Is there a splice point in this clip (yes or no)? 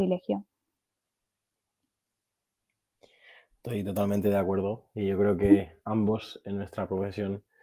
no